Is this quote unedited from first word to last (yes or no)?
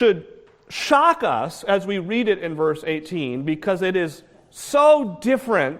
yes